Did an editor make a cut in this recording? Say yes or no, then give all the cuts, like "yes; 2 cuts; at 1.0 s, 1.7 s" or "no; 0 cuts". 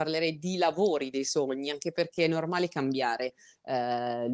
no; 0 cuts